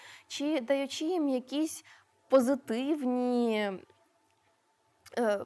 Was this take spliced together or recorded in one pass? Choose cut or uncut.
uncut